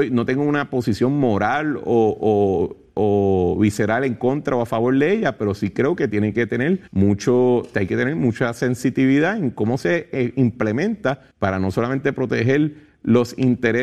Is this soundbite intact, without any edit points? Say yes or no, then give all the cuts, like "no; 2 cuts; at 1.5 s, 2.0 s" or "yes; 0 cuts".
no; 2 cuts; at 6.9 s, 11.3 s